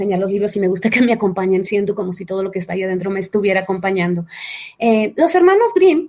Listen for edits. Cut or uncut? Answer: uncut